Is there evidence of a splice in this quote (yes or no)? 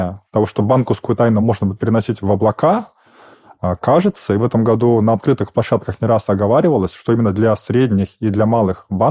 no